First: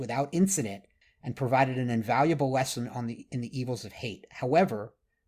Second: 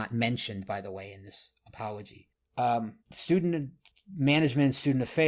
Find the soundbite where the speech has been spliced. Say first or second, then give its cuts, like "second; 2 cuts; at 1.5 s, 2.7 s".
second; 1 cut; at 3.0 s